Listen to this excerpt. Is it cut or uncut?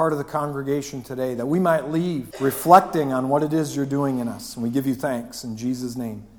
cut